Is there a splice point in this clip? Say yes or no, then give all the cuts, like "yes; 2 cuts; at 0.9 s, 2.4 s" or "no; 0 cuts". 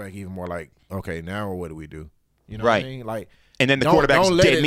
no; 0 cuts